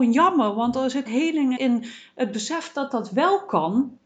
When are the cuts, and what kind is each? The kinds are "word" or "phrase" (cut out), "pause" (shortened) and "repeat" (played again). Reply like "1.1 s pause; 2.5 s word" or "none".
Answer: 1.1 s word; 1.6 s phrase